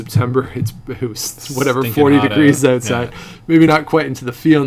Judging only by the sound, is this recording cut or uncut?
uncut